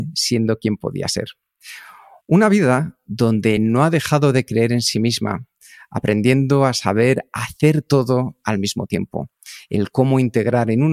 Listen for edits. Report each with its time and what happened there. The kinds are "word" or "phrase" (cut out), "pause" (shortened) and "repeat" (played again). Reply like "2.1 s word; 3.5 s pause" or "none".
none